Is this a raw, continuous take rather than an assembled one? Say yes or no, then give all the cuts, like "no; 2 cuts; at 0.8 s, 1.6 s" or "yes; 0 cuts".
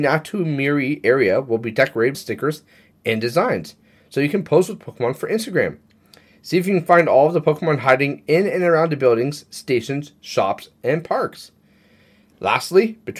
no; 1 cut; at 2.1 s